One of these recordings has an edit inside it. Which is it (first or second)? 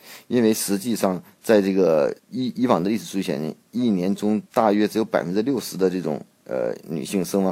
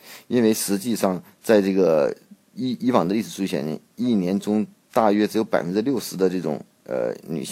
first